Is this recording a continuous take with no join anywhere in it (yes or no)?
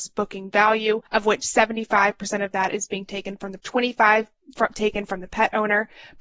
no